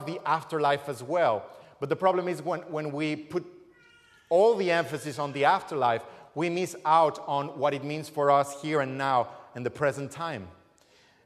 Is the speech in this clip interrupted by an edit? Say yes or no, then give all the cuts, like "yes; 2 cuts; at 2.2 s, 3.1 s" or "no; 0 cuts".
no; 0 cuts